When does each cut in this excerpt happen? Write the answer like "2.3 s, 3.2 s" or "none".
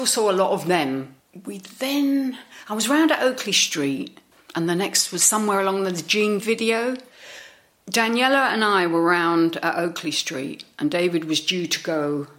6.4 s